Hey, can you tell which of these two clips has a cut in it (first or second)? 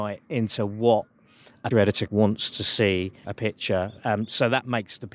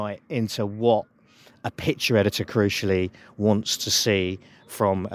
first